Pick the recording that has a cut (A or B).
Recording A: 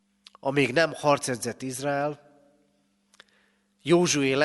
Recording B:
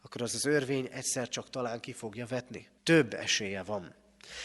B